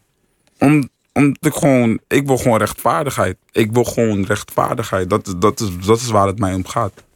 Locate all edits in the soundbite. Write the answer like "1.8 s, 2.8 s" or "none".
1.4 s, 2.0 s, 3.4 s